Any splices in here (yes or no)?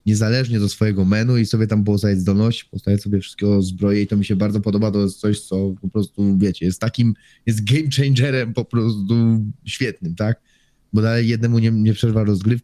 no